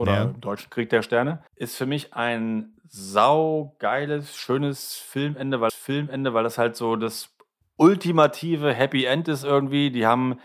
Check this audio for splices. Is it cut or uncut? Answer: cut